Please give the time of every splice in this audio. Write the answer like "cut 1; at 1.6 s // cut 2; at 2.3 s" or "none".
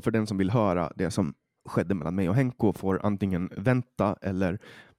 none